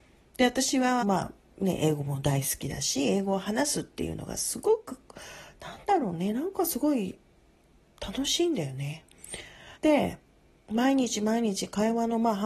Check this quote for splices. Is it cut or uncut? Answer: cut